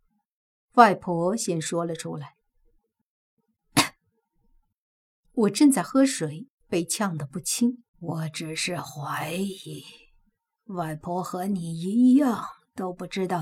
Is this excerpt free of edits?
no; 1 cut; at 7.9 s

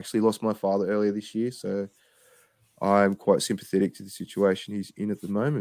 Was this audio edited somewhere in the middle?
no; 0 cuts

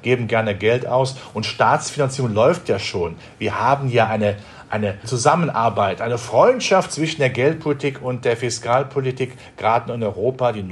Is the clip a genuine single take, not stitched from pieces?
no; 1 cut; at 5.0 s

